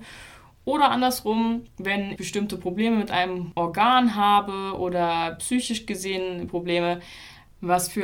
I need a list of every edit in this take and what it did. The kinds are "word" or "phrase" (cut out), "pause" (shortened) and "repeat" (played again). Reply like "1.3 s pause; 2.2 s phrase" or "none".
2.2 s word; 6.5 s word